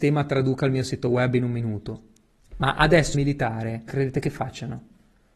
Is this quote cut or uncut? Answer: cut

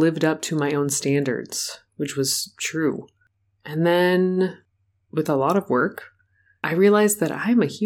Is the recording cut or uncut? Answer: uncut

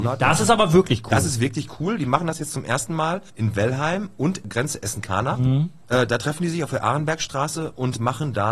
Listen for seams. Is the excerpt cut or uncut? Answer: cut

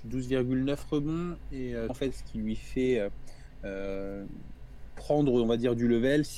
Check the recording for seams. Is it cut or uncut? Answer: cut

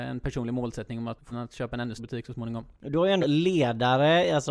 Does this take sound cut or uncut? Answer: cut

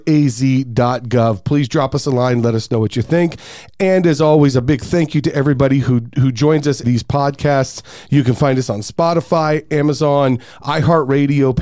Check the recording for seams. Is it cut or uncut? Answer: cut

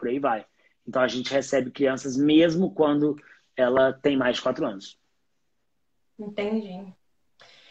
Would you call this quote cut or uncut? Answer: uncut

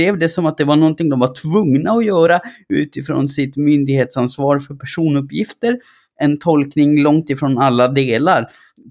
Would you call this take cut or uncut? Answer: uncut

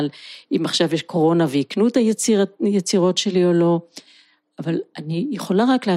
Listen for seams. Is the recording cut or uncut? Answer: uncut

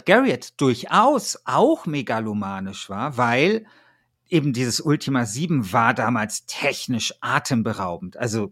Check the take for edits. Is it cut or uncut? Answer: uncut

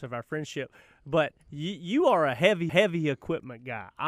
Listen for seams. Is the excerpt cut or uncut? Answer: cut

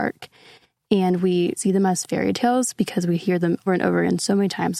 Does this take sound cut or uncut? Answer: cut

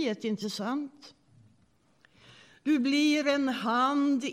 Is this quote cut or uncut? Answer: uncut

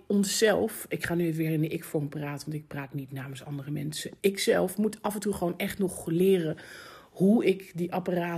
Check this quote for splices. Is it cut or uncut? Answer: cut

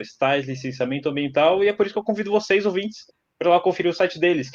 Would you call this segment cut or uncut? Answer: uncut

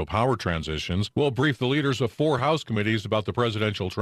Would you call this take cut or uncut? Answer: uncut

